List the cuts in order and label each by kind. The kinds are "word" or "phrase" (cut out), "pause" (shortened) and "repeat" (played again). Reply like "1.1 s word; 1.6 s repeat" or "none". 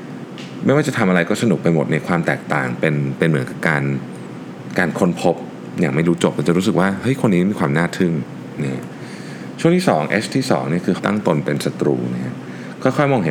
11.0 s word

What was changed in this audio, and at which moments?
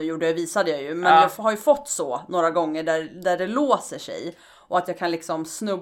none

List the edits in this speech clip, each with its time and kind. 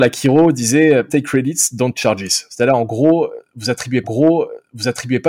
1.1 s word; 1.9 s word; 4.0 s repeat

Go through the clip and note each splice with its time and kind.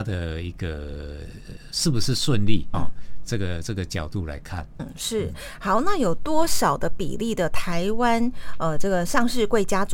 2.7 s word; 4.8 s word

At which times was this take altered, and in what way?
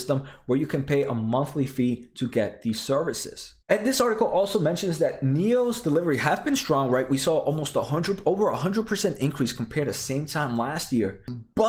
3.6 s pause

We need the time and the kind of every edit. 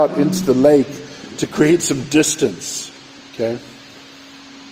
3.2 s pause

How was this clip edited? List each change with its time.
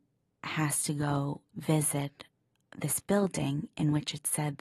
1.5 s word

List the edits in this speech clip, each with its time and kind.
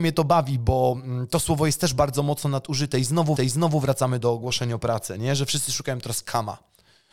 3.4 s repeat

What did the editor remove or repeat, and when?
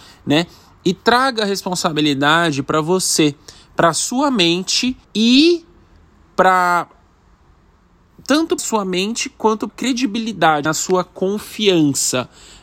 5.0 s pause; 8.6 s word; 9.7 s phrase; 10.6 s word

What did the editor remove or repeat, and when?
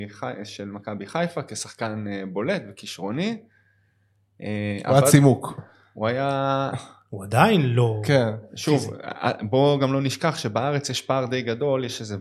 none

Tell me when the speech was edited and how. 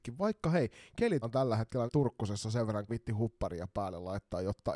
1.2 s word; 1.9 s phrase; 2.9 s phrase

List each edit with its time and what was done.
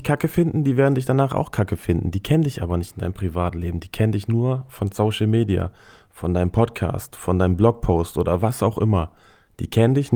none

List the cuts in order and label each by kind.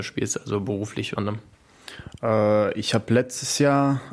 1.2 s word

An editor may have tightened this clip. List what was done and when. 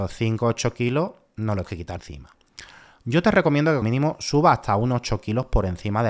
1.6 s word; 2.0 s word; 3.8 s word

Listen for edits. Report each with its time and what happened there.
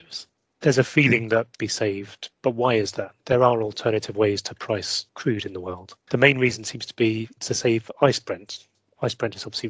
1.6 s phrase; 2.3 s word; 5.1 s pause; 7.4 s word

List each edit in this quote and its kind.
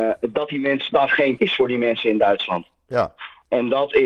0.9 s phrase; 1.4 s word

